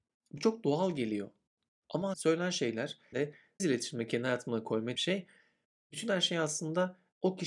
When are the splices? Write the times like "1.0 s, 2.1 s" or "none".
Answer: 2.1 s, 3.1 s, 3.6 s, 4.9 s